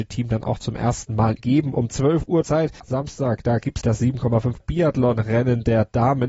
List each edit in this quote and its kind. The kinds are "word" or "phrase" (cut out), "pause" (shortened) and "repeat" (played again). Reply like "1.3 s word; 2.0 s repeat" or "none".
1.4 s word; 1.9 s word; 2.4 s word; 2.8 s word; 3.8 s word; 4.6 s word